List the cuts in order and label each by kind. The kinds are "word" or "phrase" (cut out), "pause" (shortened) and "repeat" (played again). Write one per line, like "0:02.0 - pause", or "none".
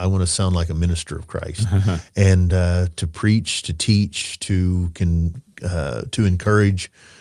none